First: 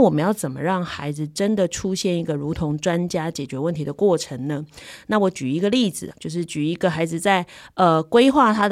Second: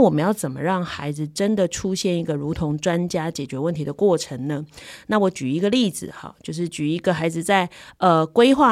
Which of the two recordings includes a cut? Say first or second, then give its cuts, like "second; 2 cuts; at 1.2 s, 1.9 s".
first; 1 cut; at 6.1 s